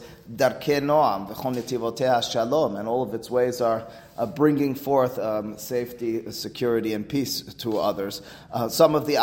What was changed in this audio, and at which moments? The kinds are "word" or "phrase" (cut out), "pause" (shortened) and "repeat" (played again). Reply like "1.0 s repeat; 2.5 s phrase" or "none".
none